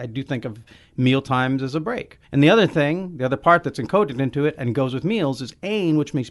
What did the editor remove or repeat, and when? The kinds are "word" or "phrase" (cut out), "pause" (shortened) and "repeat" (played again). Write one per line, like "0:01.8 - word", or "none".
0:02.2 - pause